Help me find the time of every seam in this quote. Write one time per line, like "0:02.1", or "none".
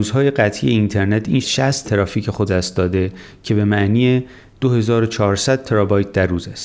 0:01.4
0:01.8
0:02.5